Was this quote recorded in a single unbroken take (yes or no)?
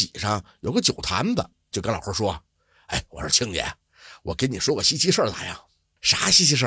yes